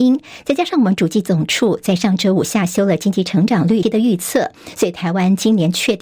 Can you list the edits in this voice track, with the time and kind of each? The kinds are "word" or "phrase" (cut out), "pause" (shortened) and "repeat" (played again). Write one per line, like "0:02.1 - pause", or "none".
0:03.8 - word